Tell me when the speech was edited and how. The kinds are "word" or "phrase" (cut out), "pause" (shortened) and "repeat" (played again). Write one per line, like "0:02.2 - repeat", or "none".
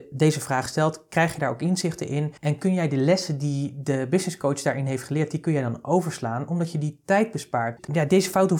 0:02.4 - pause